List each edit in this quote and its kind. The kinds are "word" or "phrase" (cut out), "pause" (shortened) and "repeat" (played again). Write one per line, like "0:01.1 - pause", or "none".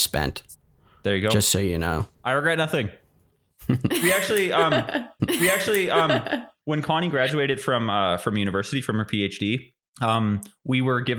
0:02.1 - pause
0:05.2 - repeat
0:09.8 - pause

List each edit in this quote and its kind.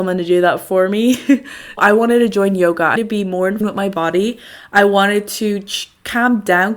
0:01.8 - word
0:03.0 - word
0:03.6 - phrase

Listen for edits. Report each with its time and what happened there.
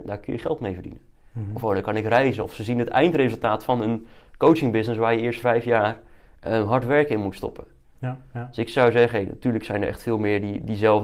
0:05.4 - word

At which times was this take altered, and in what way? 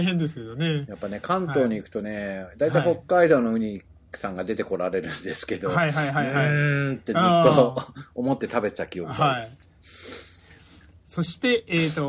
none

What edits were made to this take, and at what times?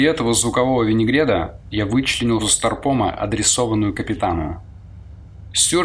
0:02.4 - word

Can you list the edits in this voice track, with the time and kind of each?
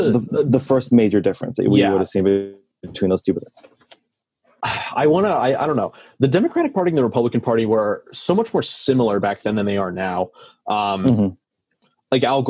none

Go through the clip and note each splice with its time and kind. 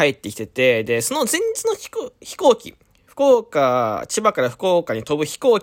none

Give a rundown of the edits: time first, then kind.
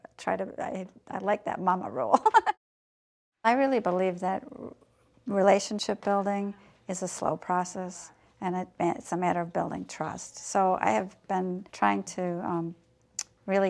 0:11.7 - pause

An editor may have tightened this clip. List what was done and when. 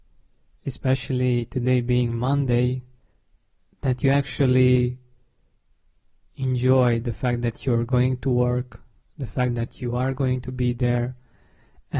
none

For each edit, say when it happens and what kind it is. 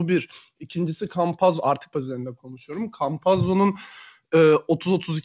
0:01.9 - word

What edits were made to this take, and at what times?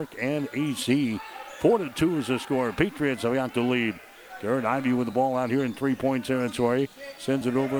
none

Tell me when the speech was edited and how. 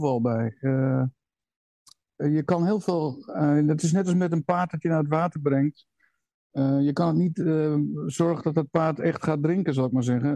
none

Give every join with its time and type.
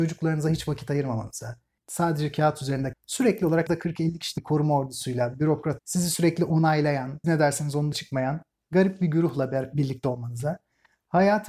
0:01.8 - word
0:02.9 - word
0:03.7 - word
0:04.4 - word
0:05.8 - word
0:07.2 - word
0:07.9 - word

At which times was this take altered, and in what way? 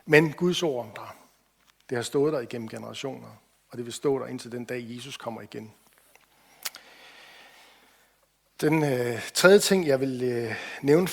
0:00.9 - word

